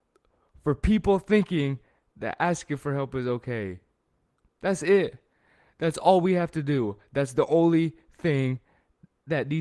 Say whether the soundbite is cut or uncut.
uncut